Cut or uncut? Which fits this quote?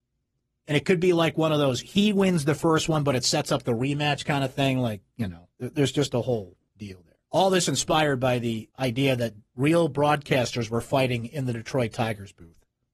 cut